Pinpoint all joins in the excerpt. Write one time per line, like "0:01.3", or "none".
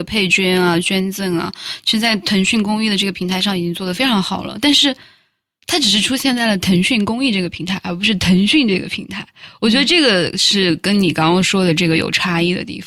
none